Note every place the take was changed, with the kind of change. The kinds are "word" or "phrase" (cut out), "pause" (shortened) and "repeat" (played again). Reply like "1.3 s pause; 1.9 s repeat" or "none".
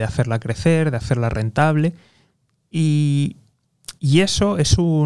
4.0 s pause